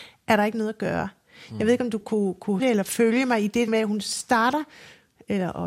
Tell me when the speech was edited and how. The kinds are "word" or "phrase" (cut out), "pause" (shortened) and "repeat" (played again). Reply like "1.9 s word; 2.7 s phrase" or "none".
2.0 s word; 2.6 s word; 3.7 s word